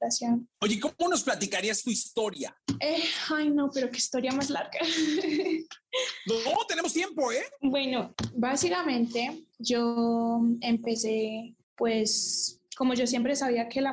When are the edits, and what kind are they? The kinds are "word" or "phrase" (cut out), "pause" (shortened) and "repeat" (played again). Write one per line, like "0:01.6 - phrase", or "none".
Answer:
0:09.5 - pause
0:11.6 - pause